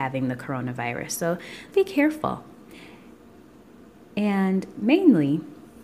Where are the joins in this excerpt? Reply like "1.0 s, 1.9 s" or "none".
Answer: 1.7 s